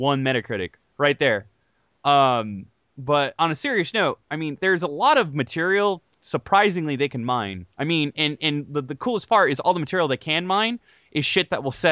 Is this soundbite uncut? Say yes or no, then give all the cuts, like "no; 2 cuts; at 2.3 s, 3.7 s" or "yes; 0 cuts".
no; 1 cut; at 7.7 s